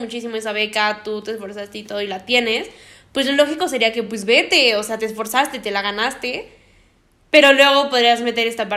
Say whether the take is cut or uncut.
uncut